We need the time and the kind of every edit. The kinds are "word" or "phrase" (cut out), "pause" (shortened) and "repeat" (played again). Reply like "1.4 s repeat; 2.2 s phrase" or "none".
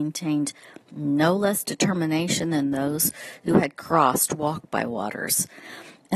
none